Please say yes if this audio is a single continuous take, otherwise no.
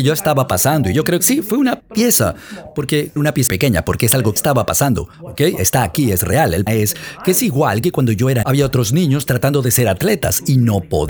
no